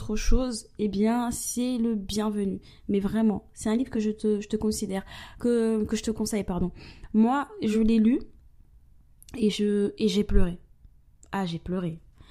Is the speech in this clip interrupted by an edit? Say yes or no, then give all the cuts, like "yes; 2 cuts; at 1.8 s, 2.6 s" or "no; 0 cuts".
no; 0 cuts